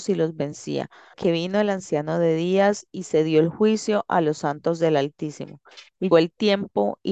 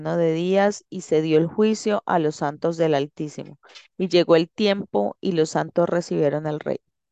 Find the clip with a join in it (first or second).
first